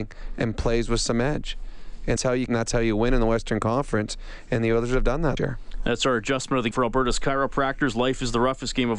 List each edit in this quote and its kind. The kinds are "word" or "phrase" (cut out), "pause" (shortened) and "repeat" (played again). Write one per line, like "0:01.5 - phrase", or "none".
0:02.2 - word
0:02.5 - word
0:05.4 - word
0:06.7 - word